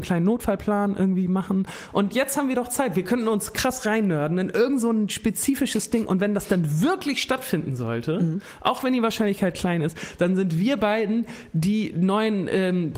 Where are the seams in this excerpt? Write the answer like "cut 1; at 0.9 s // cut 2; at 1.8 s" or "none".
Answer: none